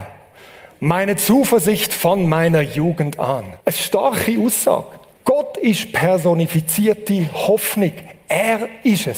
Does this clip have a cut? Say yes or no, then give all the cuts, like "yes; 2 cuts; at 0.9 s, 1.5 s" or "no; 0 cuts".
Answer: yes; 2 cuts; at 3.6 s, 5.1 s